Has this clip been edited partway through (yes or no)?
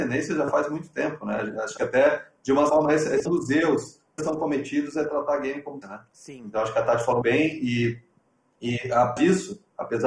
yes